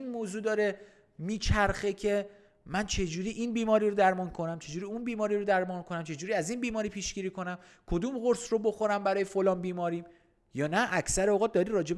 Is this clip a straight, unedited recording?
yes; 0 cuts

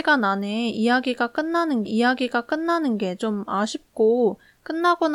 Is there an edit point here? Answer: yes; 1 cut; at 1.9 s

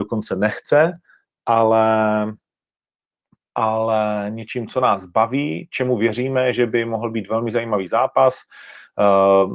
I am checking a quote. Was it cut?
no; 0 cuts

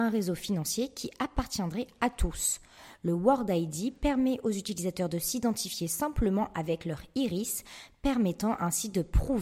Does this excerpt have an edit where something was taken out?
no; 0 cuts

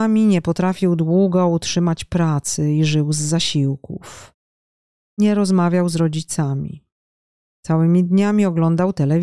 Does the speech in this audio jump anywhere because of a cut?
no; 0 cuts

